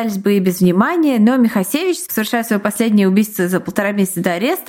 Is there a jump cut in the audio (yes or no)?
no